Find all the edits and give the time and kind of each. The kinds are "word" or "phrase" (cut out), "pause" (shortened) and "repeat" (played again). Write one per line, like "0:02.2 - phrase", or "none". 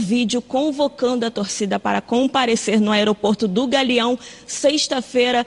none